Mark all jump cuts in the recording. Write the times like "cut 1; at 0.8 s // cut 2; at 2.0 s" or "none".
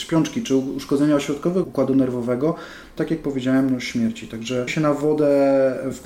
cut 1; at 1.6 s // cut 2; at 3.0 s // cut 3; at 4.7 s